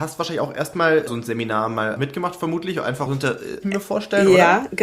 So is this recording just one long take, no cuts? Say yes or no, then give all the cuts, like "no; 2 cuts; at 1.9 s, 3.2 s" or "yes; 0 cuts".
no; 4 cuts; at 1.1 s, 2.0 s, 3.1 s, 3.6 s